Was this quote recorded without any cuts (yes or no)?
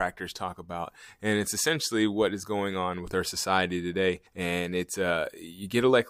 no